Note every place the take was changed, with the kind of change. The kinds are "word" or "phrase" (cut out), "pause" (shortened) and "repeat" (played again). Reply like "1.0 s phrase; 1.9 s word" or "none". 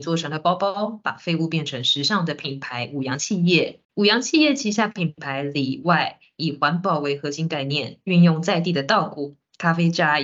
3.8 s pause